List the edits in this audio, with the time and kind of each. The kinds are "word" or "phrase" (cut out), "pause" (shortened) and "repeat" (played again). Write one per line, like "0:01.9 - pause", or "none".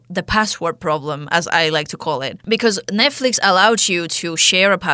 none